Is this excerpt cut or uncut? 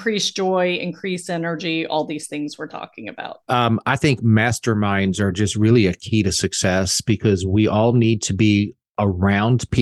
uncut